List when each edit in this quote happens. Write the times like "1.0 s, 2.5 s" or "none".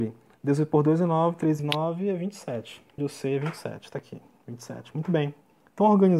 1.6 s, 3.0 s